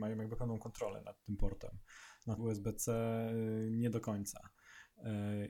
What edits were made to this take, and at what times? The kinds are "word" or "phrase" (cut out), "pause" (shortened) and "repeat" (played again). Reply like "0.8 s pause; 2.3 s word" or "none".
2.4 s word